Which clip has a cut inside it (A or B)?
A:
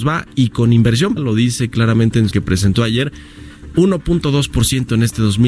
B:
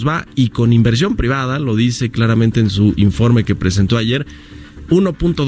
A